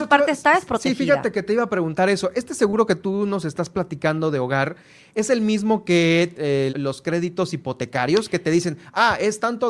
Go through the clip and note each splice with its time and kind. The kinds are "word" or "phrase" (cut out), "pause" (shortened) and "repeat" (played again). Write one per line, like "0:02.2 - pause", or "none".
0:06.3 - word
0:06.7 - word